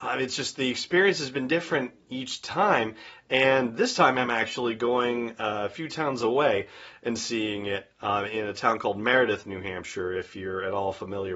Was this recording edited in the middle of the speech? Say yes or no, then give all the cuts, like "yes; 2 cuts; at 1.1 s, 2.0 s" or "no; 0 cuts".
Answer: no; 0 cuts